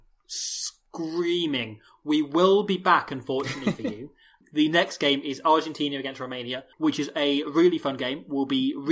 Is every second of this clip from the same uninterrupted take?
no; 1 cut; at 6.7 s

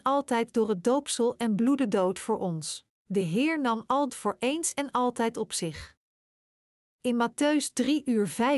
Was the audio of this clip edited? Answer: yes; 2 cuts; at 3.0 s, 4.1 s

